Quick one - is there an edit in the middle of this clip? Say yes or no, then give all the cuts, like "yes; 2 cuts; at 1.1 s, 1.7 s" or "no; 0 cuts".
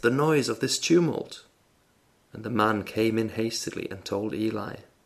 no; 0 cuts